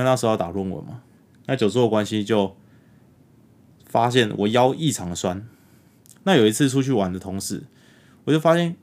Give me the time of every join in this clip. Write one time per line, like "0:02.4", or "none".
none